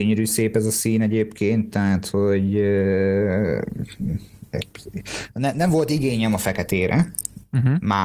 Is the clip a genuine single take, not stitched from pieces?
yes; 0 cuts

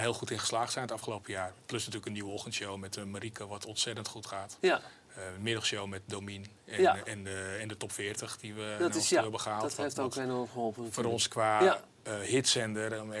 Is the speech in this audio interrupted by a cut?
no; 0 cuts

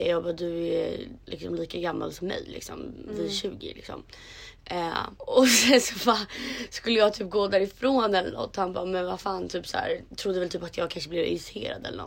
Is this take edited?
yes; 3 cuts; at 1.2 s, 5.2 s, 10.1 s

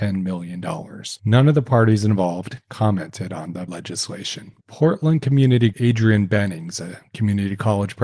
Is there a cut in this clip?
yes; 3 cuts; at 3.7 s, 4.6 s, 5.7 s

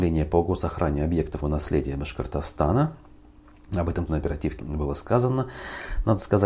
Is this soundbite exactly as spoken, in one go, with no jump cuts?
no; 3 cuts; at 1.4 s, 4.1 s, 4.6 s

